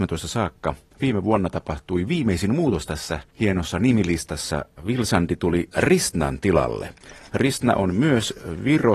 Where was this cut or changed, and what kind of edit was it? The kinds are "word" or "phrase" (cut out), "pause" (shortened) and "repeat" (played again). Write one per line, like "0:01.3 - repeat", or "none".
none